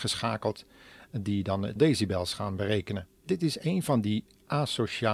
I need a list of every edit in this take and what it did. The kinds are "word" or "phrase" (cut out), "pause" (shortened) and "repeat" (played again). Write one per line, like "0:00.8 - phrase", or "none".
0:01.8 - word
0:03.2 - pause